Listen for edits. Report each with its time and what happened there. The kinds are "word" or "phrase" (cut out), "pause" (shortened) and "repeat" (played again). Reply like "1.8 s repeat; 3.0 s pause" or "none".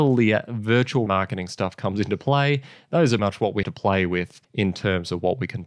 1.1 s phrase; 3.2 s word; 3.6 s word; 4.4 s pause